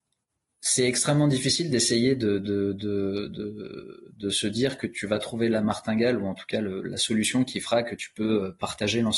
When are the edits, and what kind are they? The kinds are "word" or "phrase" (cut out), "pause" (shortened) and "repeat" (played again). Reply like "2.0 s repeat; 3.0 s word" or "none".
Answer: none